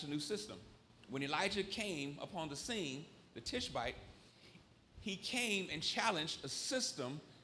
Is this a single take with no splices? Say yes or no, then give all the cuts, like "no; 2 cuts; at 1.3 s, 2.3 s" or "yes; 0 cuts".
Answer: yes; 0 cuts